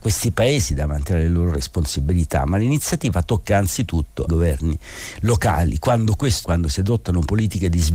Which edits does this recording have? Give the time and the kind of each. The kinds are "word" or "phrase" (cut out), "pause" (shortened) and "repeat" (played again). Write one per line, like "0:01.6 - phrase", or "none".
0:04.3 - word
0:06.4 - word